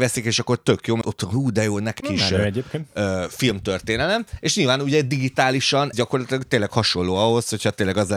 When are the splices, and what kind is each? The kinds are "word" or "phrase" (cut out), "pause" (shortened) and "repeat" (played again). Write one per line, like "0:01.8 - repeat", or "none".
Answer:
0:01.0 - word
0:02.0 - phrase
0:05.9 - word

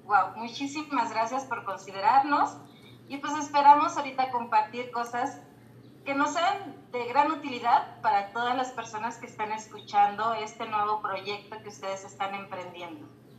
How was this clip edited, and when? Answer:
none

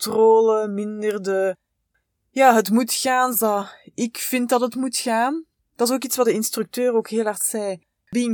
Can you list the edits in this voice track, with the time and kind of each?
0:03.3 - word
0:06.2 - word

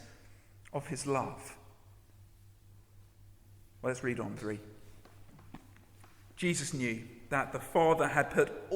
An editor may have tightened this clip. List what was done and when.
0:04.4 - word

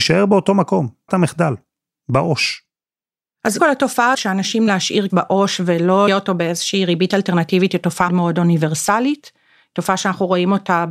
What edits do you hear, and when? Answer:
0:01.1 - word
0:03.6 - word
0:04.1 - word
0:04.7 - word
0:05.1 - word
0:06.1 - word
0:08.1 - word

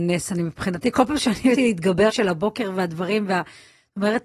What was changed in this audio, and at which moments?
0:01.6 - word
0:02.1 - phrase

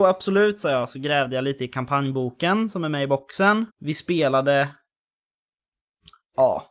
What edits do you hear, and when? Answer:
0:03.7 - pause

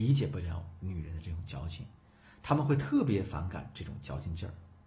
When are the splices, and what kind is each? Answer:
none

